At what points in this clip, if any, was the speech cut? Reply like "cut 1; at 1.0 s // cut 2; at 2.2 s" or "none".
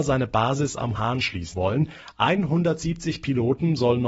cut 1; at 1.0 s // cut 2; at 1.5 s